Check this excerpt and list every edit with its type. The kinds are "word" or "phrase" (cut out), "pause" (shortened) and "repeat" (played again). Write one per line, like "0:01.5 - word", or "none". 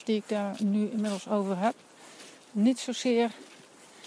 none